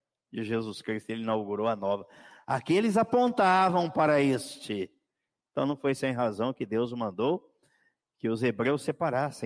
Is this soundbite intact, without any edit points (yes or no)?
yes